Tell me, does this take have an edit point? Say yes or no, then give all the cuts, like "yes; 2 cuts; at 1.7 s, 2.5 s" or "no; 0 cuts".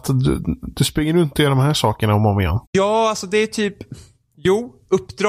yes; 1 cut; at 2.6 s